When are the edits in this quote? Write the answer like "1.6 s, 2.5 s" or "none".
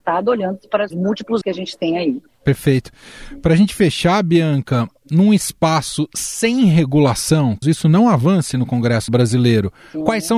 0.9 s, 1.4 s, 7.6 s, 9.1 s